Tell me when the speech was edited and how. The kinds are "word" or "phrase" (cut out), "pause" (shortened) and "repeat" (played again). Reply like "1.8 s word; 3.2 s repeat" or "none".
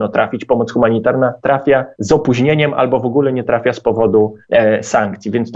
1.9 s pause; 4.4 s pause